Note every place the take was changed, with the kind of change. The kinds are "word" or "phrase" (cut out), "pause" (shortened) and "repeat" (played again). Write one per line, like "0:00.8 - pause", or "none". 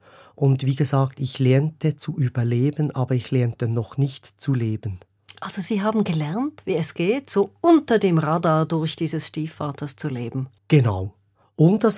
0:10.6 - pause

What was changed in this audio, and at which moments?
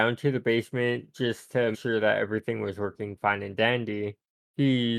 0:01.7 - word

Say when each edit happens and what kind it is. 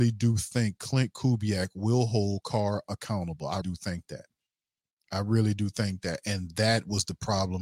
0:03.6 - word

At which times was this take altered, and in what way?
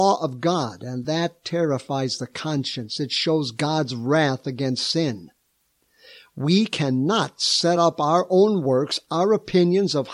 none

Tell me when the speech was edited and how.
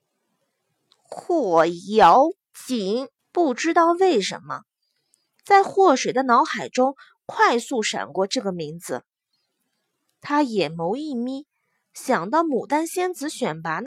0:03.2 - pause

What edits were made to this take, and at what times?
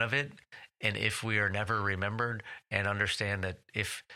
none

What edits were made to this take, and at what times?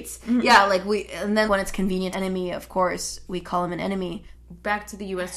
0:01.5 - word
0:02.1 - phrase

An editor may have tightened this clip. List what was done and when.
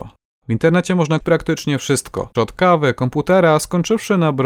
0:01.2 - word
0:02.3 - word

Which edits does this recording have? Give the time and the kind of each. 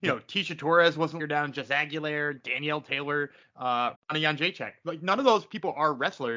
0:01.2 - phrase
0:03.9 - phrase

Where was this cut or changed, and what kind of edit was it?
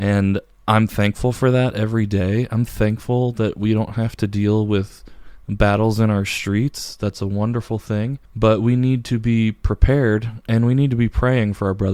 0:08.3 - pause

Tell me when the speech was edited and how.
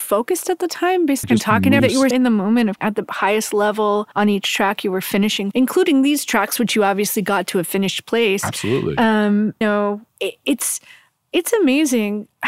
0:01.2 - phrase
0:01.8 - word
0:02.1 - word
0:02.8 - word
0:04.1 - pause
0:05.5 - phrase
0:09.6 - word
0:10.1 - pause

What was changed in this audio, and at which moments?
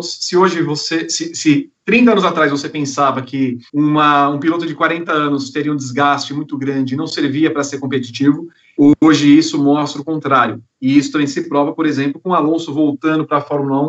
0:03.7 - pause

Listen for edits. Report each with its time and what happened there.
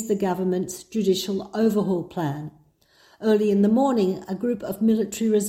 none

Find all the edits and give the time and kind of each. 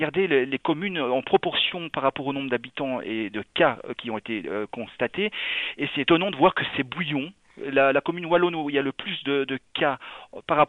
none

